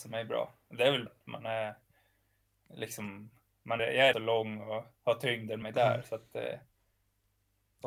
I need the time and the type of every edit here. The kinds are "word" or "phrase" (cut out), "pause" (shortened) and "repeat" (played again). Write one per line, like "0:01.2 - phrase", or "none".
0:01.1 - word
0:03.8 - word
0:04.1 - word
0:05.6 - word